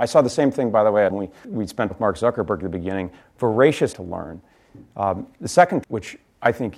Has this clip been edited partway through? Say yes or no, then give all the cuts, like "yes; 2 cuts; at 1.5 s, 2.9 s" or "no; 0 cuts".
yes; 5 cuts; at 1.1 s, 1.4 s, 1.9 s, 3.9 s, 5.8 s